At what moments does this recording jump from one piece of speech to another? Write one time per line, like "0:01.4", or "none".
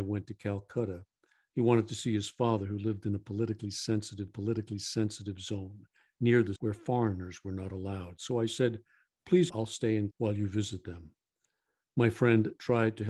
0:04.3
0:06.6
0:09.5
0:10.1